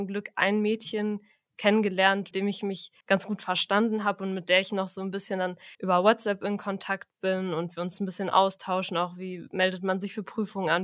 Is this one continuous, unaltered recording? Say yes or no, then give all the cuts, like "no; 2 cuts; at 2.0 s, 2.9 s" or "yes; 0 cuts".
no; 3 cuts; at 2.3 s, 3.0 s, 5.7 s